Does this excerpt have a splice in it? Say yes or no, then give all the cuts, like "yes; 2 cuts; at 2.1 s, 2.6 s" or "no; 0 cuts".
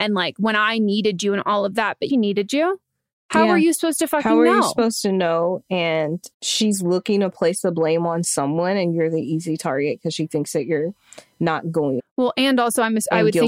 yes; 3 cuts; at 2.1 s, 6.3 s, 12.0 s